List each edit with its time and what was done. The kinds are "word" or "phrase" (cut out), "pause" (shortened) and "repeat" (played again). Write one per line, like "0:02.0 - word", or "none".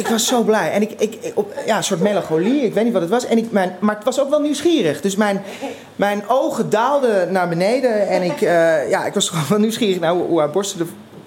none